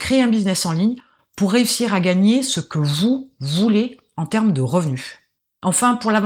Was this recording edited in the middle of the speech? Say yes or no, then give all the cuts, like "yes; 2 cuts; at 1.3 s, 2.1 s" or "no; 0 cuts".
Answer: no; 0 cuts